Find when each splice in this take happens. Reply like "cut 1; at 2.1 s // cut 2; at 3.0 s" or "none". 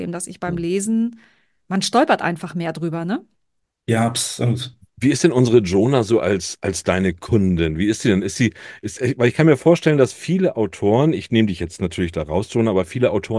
none